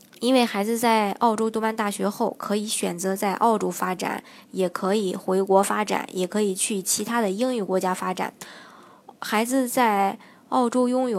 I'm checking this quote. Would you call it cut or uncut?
uncut